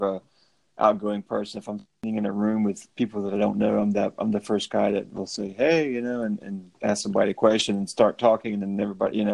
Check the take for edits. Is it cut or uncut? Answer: cut